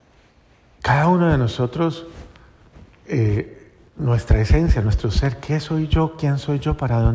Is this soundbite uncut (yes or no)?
yes